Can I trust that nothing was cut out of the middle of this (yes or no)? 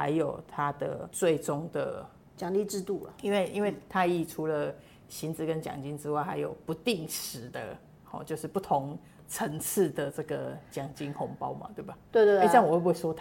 yes